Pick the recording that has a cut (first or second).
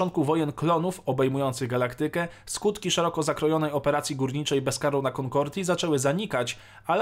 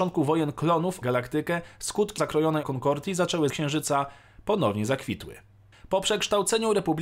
second